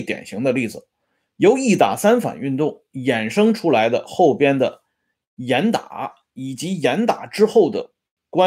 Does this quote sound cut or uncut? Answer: uncut